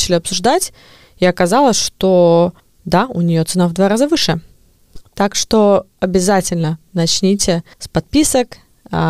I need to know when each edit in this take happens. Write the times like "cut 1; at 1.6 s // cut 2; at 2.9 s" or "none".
cut 1; at 2.6 s // cut 2; at 7.7 s